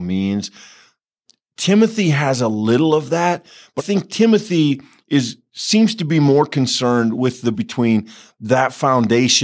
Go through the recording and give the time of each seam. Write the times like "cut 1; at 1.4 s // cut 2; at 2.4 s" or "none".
cut 1; at 3.8 s // cut 2; at 7.5 s